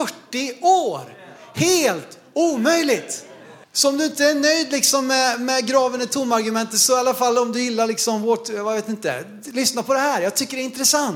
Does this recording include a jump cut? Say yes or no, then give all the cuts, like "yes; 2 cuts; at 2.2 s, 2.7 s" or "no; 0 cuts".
yes; 1 cut; at 3.6 s